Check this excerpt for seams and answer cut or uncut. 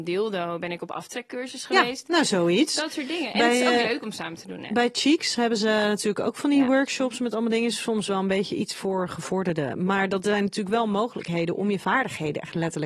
uncut